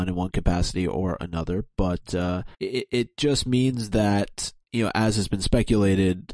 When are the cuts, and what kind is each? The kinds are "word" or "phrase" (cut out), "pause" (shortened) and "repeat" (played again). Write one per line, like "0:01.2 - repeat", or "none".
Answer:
0:02.5 - pause